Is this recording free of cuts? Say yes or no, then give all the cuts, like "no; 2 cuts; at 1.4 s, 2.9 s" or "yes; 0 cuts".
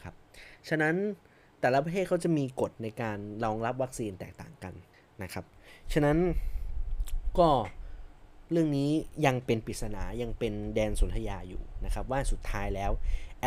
no; 1 cut; at 4.9 s